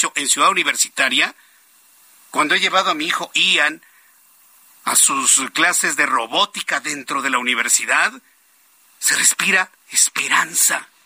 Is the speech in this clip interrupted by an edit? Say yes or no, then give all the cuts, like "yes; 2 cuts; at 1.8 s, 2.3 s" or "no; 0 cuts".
yes; 1 cut; at 9.8 s